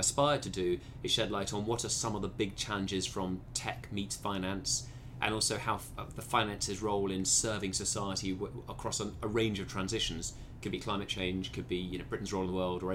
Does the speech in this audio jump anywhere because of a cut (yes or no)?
no